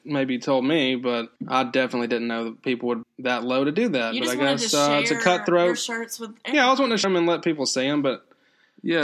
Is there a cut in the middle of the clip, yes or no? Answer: yes